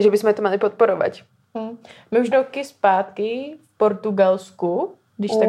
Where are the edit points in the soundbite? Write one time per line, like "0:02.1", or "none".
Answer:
0:02.3

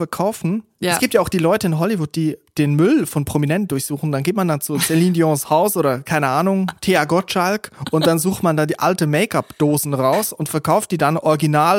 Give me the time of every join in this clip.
none

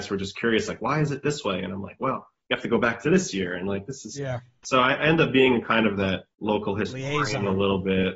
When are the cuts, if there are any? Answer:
0:06.3

